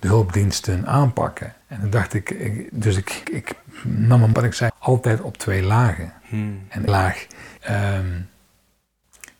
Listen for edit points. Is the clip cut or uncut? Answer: cut